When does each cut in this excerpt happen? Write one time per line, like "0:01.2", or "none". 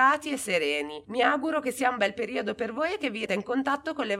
0:03.3